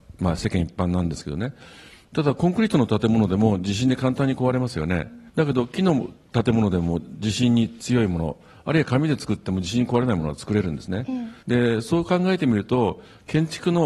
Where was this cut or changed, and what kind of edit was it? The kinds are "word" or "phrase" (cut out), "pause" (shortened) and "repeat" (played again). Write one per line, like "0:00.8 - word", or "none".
0:05.3 - pause
0:11.4 - pause

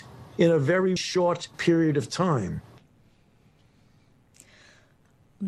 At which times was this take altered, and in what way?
0:01.0 - word
0:01.5 - pause

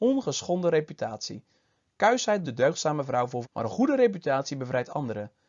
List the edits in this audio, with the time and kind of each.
0:02.4 - word
0:03.4 - word

